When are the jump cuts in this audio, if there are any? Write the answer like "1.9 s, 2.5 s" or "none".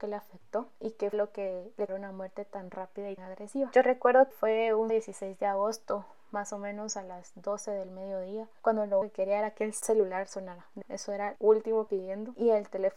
1.1 s, 1.9 s, 3.2 s, 4.3 s, 4.9 s, 9.0 s, 10.8 s, 11.4 s, 11.9 s